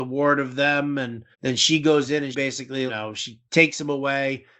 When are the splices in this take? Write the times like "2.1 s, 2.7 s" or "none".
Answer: 1.3 s, 2.3 s, 2.9 s, 3.5 s